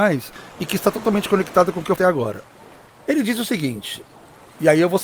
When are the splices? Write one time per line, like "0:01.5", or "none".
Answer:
0:02.0